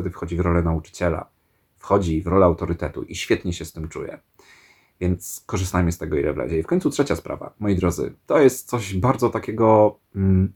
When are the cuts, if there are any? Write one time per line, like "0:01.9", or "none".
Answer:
none